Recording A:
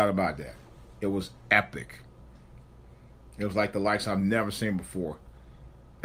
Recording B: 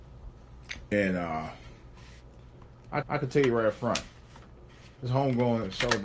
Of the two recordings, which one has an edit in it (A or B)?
B